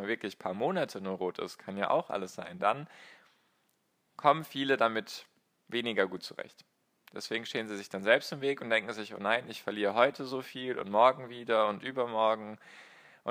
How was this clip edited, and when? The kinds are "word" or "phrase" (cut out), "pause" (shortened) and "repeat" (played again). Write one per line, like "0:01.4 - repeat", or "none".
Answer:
none

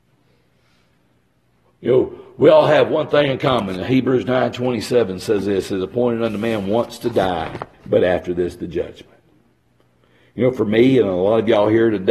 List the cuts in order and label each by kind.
0:07.7 - pause
0:09.7 - pause

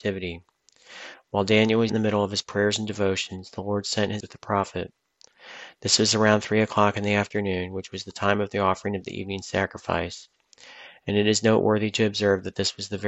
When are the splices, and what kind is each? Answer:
0:01.9 - word
0:04.2 - phrase

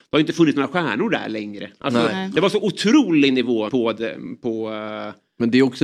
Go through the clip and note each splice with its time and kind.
0:03.7 - word

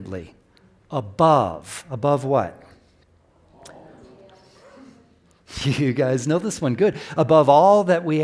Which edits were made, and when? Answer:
none

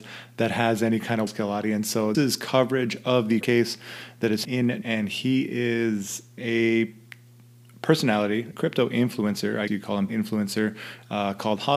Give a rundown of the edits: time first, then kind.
0:01.3 - word
0:02.1 - word
0:03.4 - word
0:04.4 - word
0:04.8 - word
0:06.4 - word
0:08.5 - word
0:09.7 - word
0:10.1 - word

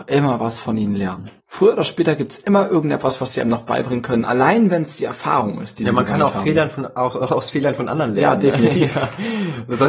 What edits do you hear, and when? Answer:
0:01.4 - pause

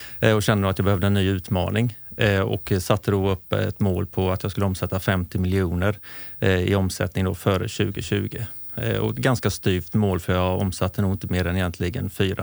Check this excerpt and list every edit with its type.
none

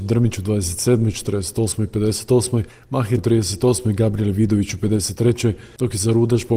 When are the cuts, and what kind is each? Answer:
0:03.2 - word

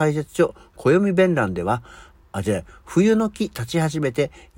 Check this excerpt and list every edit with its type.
0:02.2 - phrase

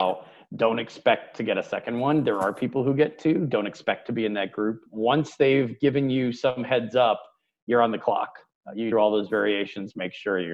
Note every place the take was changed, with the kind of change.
0:08.9 - phrase

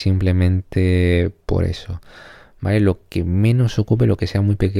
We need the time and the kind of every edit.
none

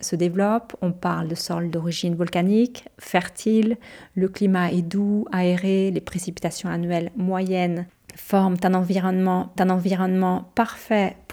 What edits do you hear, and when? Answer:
0:09.6 - repeat

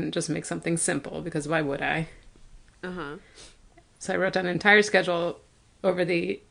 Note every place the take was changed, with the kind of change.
none

